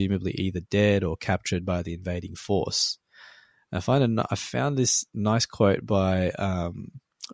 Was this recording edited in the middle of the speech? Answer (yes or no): no